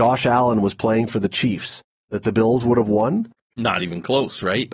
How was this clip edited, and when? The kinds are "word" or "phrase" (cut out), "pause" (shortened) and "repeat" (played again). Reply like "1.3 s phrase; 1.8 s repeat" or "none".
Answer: none